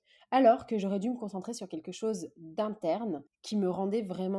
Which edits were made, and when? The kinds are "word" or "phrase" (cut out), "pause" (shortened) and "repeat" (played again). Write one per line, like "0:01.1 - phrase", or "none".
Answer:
0:03.3 - pause